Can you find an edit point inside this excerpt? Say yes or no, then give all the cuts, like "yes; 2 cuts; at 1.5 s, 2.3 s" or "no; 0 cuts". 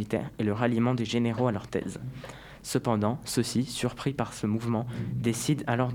no; 0 cuts